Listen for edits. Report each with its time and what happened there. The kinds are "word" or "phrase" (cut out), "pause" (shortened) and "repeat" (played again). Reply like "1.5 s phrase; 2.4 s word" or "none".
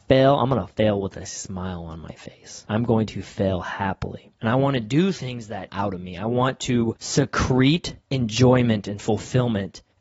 5.7 s phrase